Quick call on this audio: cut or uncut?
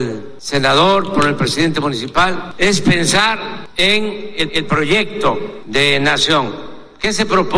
cut